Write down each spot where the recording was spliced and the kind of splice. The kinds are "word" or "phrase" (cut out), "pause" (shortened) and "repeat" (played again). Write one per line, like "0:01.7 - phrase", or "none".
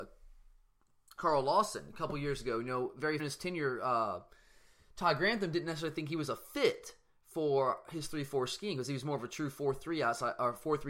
0:03.2 - phrase